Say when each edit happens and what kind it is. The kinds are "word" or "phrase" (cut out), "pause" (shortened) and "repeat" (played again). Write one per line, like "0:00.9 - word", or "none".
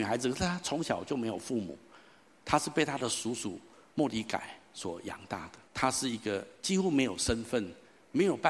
0:05.7 - pause